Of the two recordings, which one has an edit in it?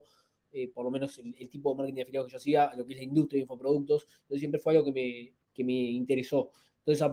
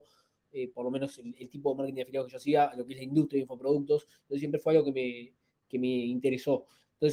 first; 1 cut; at 5.4 s

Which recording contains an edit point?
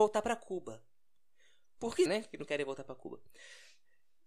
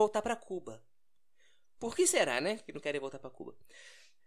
first; 1 cut; at 2.1 s

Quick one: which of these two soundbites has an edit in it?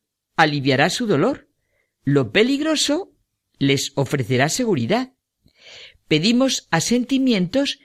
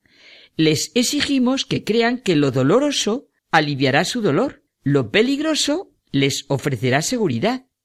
second; 3 cuts; at 3.4 s, 4.7 s, 6.0 s

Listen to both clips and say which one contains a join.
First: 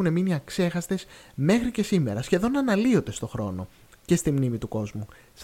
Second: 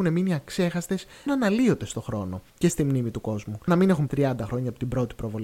second; 4 cuts; at 1.3 s, 2.5 s, 3.7 s, 4.1 s

